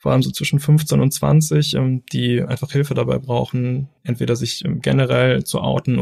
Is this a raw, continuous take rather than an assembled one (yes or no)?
no